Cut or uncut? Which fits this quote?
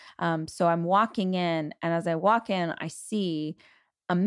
uncut